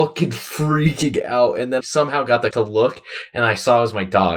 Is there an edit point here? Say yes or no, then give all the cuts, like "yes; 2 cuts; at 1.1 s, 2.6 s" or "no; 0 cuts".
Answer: yes; 2 cuts; at 1.8 s, 2.5 s